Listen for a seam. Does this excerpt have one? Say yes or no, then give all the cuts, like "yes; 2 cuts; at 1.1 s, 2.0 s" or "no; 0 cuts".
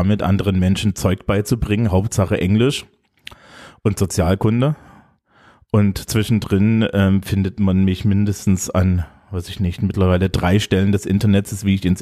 no; 0 cuts